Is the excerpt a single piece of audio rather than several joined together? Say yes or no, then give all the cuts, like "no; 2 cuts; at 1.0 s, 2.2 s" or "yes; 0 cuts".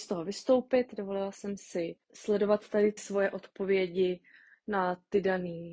no; 2 cuts; at 2.0 s, 3.0 s